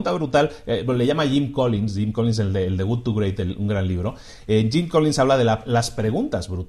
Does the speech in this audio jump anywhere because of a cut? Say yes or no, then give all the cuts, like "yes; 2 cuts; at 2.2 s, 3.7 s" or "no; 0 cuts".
no; 0 cuts